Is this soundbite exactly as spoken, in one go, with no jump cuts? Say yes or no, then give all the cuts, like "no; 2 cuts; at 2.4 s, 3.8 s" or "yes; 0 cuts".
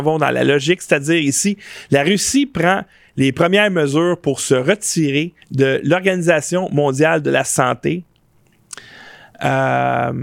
no; 1 cut; at 5.4 s